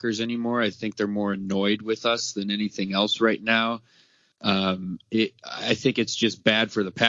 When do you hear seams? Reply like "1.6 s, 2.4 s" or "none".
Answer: none